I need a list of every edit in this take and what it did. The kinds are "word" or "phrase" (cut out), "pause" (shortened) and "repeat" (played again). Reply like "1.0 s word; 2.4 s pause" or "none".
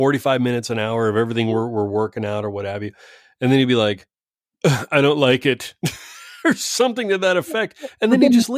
none